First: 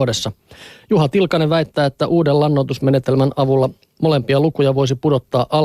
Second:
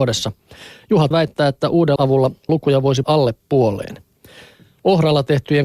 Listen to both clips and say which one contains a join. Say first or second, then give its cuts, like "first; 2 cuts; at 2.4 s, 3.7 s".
second; 4 cuts; at 1.1 s, 2.0 s, 2.5 s, 3.0 s